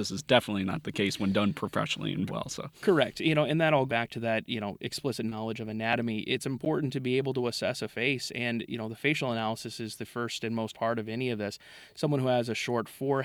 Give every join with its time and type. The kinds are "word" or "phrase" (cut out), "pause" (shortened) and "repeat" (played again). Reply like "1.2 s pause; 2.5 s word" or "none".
2.3 s word; 3.9 s word; 10.7 s word

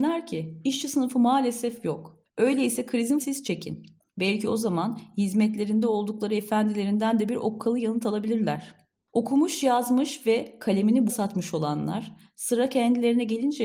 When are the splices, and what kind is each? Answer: 3.2 s word; 11.1 s word

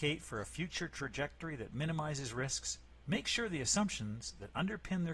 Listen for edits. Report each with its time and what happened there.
none

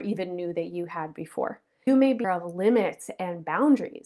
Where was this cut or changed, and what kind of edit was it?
1.9 s word; 2.2 s word

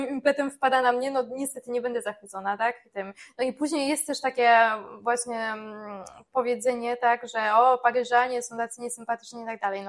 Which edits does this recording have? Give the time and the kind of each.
none

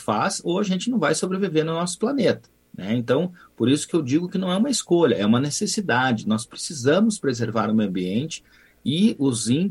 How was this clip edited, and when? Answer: none

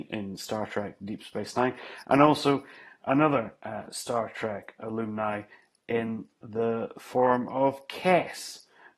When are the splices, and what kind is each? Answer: none

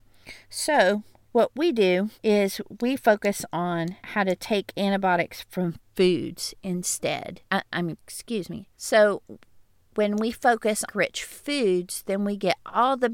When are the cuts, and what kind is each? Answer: 2.2 s pause; 4.0 s pause; 7.5 s pause; 8.0 s word; 8.7 s pause; 10.9 s phrase

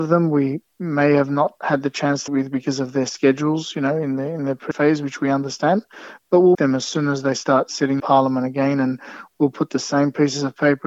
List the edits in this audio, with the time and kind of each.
2.3 s word; 4.7 s word; 6.5 s word; 8.0 s word

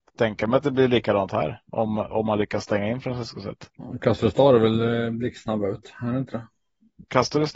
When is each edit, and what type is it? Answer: none

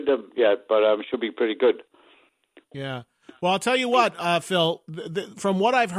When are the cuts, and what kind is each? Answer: none

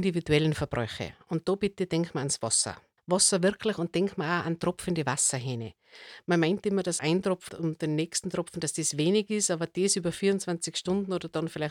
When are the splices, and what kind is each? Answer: 3.0 s pause; 7.0 s word; 7.5 s word

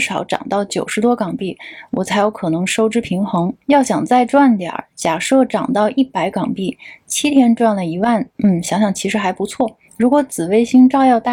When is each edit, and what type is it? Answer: 3.6 s pause; 8.3 s pause; 9.9 s pause

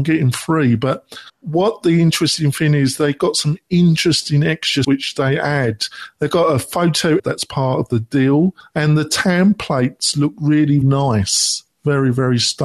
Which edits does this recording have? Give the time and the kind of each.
1.3 s pause; 4.8 s word; 7.2 s word; 10.8 s word

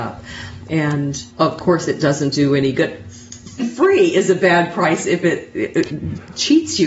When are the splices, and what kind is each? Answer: 1.3 s pause; 3.6 s word

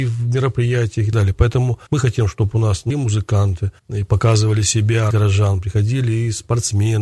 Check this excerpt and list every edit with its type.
1.1 s word; 1.9 s pause; 2.9 s phrase; 3.8 s pause; 5.1 s word

